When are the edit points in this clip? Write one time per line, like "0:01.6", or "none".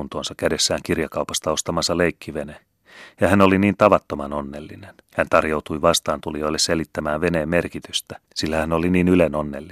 0:05.0
0:08.2